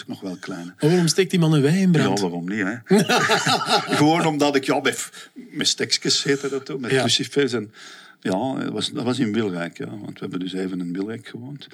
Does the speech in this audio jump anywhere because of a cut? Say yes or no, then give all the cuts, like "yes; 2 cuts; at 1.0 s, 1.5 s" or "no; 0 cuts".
no; 0 cuts